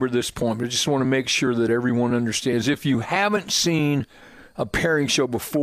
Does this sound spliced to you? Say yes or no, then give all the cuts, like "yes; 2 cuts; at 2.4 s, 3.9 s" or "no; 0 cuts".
no; 0 cuts